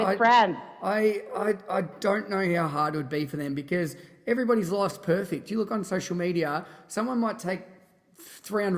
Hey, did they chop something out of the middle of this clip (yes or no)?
no